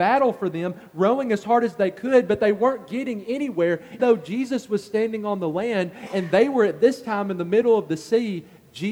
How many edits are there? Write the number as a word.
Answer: one